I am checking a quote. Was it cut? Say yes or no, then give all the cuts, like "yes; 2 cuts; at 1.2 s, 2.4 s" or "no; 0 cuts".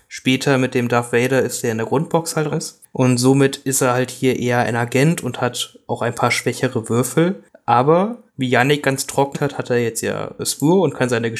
yes; 3 cuts; at 2.5 s, 8.3 s, 9.3 s